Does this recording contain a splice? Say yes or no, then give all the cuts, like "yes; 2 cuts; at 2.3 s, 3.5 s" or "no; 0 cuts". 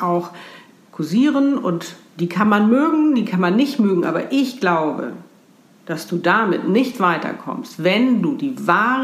no; 0 cuts